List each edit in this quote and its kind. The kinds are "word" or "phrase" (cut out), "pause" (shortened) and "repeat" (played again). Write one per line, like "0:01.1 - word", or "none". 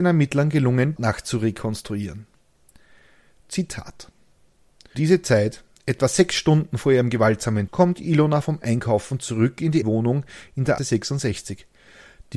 0:01.0 - phrase
0:04.9 - word
0:07.7 - word
0:08.4 - word
0:09.8 - word
0:10.8 - word